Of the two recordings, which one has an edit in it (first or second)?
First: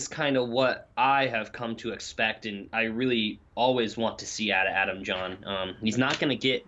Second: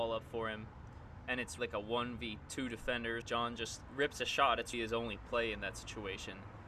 second